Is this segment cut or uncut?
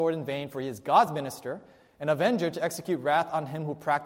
uncut